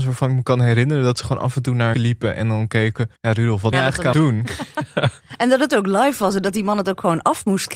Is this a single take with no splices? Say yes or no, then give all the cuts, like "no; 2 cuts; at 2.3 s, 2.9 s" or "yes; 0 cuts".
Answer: no; 4 cuts; at 1.9 s, 3.2 s, 3.7 s, 4.1 s